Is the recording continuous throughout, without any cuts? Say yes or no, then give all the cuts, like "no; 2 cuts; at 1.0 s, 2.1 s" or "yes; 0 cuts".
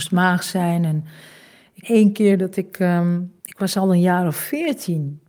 no; 2 cuts; at 1.8 s, 3.4 s